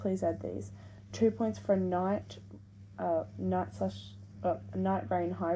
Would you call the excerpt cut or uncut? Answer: uncut